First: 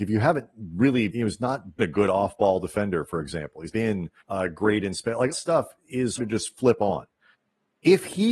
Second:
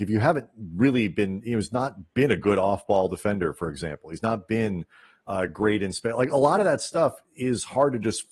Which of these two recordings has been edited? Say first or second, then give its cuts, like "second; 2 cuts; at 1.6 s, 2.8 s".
first; 7 cuts; at 1.1 s, 1.8 s, 3.7 s, 4.2 s, 5.3 s, 6.2 s, 7.3 s